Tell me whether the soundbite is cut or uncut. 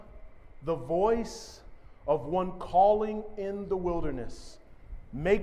uncut